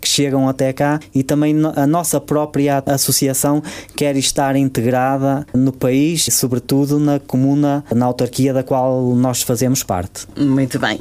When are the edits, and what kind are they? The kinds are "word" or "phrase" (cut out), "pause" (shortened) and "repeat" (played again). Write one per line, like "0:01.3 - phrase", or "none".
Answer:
0:06.3 - word